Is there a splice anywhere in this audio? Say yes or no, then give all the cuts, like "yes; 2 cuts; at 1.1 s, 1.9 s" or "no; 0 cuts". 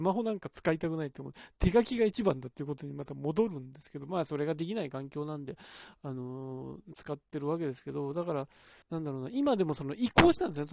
yes; 1 cut; at 8.8 s